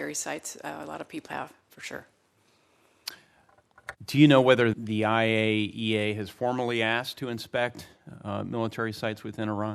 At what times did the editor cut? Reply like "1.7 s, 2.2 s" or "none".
1.3 s, 4.0 s, 4.7 s